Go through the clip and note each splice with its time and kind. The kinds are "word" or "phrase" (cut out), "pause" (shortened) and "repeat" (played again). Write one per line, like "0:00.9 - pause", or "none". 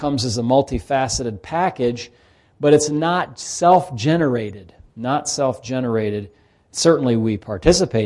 none